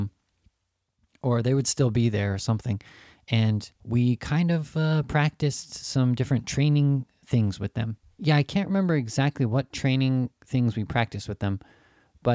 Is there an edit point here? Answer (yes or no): yes